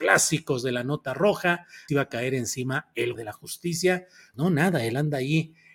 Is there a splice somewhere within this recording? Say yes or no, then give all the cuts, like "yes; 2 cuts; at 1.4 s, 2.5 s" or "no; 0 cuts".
yes; 3 cuts; at 1.9 s, 3.2 s, 4.3 s